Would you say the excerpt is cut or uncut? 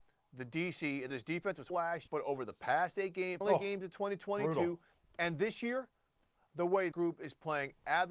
cut